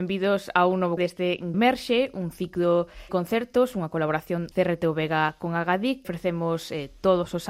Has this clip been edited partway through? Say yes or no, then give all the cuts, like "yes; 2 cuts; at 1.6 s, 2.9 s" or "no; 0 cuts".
yes; 5 cuts; at 1.0 s, 1.5 s, 3.1 s, 4.5 s, 6.0 s